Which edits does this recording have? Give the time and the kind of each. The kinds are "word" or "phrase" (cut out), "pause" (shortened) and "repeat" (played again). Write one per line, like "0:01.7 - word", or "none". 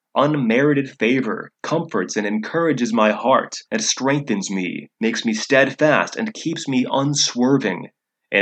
0:01.5 - pause
0:03.7 - pause
0:04.9 - pause